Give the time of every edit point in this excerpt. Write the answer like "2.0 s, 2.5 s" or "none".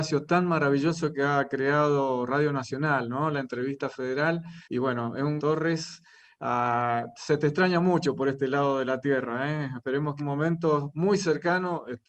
4.6 s, 5.4 s, 10.2 s